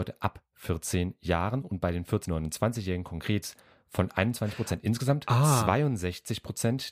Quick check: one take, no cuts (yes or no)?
no